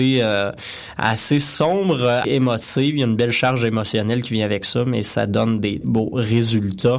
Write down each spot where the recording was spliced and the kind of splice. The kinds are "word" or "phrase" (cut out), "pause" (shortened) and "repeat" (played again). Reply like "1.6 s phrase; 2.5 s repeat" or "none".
2.2 s word; 5.8 s word